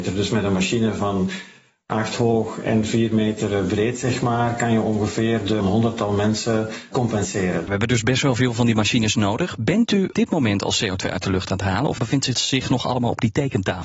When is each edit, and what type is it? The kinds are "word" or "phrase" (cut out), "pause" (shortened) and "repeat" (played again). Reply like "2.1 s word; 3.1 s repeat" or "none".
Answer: 5.6 s phrase; 10.1 s word